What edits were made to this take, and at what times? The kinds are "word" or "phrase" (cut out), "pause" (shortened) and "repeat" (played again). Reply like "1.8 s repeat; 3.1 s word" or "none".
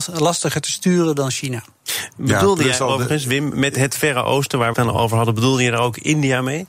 4.7 s phrase

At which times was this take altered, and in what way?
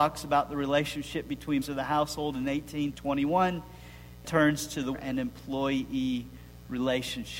1.6 s word; 2.9 s word; 4.2 s word; 4.9 s word

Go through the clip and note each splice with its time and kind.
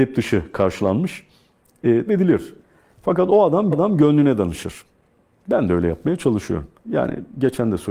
2.1 s word; 3.7 s repeat; 6.8 s pause

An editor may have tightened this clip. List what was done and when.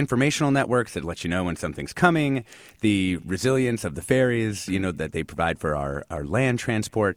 none

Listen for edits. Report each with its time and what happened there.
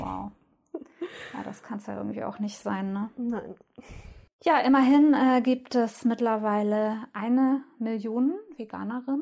4.3 s pause

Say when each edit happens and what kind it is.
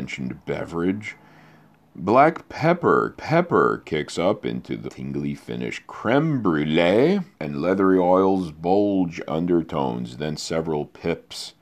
3.2 s repeat; 4.9 s phrase; 7.3 s pause; 9.3 s phrase

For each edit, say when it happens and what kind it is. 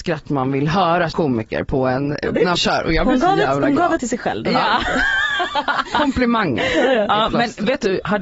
1.1 s word; 2.6 s word; 4.0 s word

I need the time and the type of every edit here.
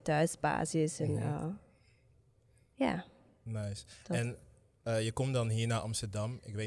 none

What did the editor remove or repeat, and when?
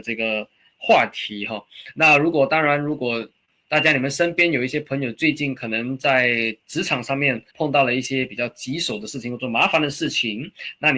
7.5 s pause

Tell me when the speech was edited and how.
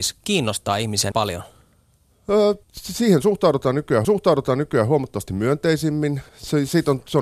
1.1 s word; 2.6 s pause; 4.0 s repeat; 6.3 s pause

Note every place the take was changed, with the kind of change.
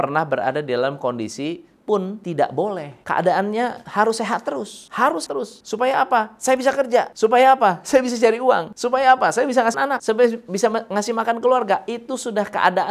1.8 s word; 5.3 s word; 9.7 s word

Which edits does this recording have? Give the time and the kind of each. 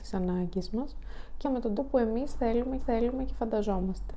1.4 s word; 1.8 s word; 2.8 s repeat

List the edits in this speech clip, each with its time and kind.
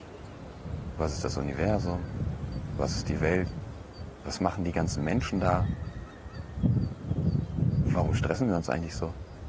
none

